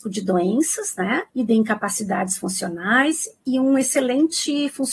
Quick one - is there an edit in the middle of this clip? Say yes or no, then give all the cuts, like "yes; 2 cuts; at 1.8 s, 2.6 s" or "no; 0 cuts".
yes; 1 cut; at 1.3 s